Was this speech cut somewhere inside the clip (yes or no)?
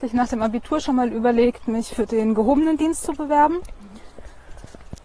no